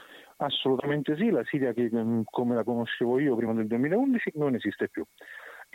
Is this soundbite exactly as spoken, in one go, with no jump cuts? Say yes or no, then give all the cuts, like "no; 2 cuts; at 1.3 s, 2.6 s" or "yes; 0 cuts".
yes; 0 cuts